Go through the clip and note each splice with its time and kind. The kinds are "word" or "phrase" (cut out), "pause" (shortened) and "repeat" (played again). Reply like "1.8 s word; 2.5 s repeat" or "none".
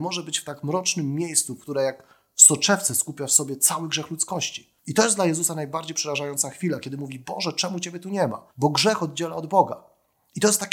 4.8 s pause; 8.5 s pause

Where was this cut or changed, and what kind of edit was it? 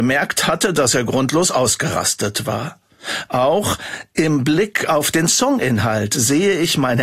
5.3 s word

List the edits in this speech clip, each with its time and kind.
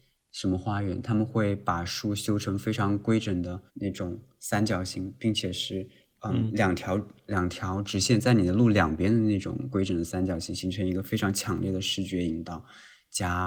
3.7 s pause; 6.0 s pause

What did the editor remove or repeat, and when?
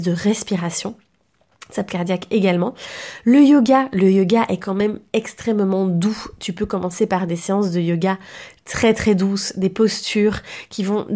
1.9 s phrase

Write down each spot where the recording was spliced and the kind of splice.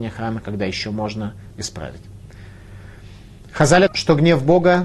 1.5 s word; 3.9 s word

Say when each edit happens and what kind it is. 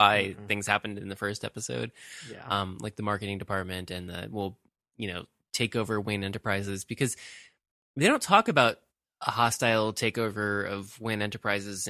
none

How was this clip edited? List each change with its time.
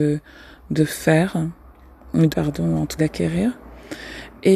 2.3 s word; 3.0 s word

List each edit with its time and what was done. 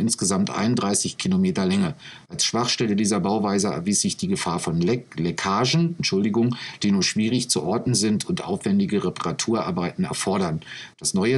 none

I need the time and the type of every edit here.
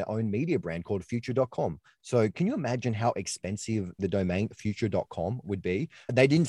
4.0 s word

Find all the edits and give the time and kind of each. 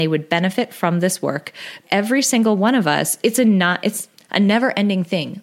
1.8 s word; 3.2 s word

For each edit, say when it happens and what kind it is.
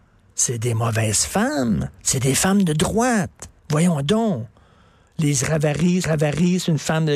2.0 s pause; 3.6 s pause; 6.0 s repeat

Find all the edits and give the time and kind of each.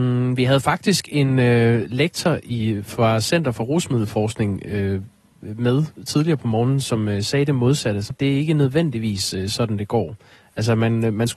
8.1 s word

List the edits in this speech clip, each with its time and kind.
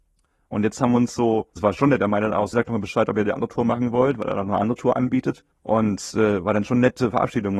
1.6 s word; 2.5 s word; 5.5 s pause

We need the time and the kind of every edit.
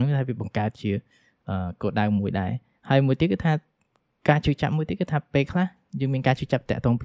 none

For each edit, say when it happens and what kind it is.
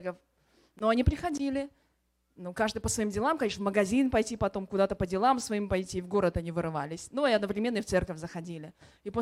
none

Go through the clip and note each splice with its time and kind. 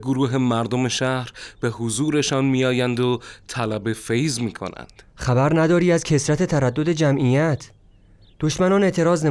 none

